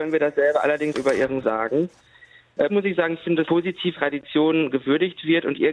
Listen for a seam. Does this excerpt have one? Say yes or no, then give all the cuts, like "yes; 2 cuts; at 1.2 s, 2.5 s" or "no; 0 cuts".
yes; 5 cuts; at 0.9 s, 1.4 s, 2.7 s, 3.4 s, 3.9 s